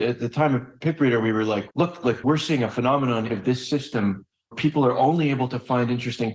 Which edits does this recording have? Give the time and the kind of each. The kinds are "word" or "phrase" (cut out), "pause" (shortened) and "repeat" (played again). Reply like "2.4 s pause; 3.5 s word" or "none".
1.7 s word; 2.2 s word; 3.3 s word; 4.5 s word